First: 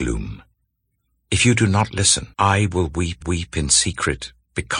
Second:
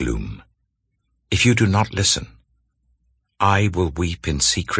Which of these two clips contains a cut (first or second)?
first